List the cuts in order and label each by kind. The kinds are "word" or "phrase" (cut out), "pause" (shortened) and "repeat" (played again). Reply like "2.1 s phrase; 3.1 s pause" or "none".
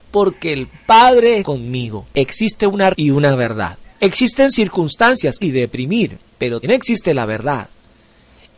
1.4 s word; 2.1 s pause; 2.9 s word; 3.9 s pause; 5.4 s phrase; 6.6 s word